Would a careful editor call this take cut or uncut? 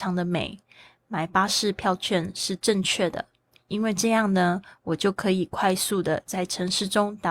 uncut